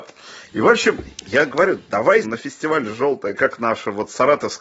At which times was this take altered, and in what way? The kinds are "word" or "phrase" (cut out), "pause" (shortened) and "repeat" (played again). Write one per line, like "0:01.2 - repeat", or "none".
0:02.2 - word
0:03.3 - phrase